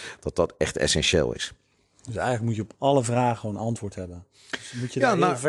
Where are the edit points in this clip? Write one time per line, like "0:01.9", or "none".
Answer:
none